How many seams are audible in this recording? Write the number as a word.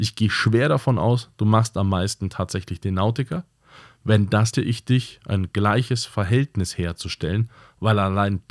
one